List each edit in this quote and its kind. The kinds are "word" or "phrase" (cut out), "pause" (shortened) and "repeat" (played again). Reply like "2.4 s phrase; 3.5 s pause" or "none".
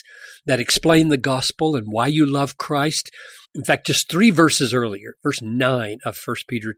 3.4 s pause